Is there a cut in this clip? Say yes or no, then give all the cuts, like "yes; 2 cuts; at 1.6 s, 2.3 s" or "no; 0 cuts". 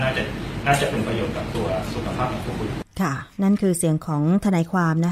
yes; 1 cut; at 2.9 s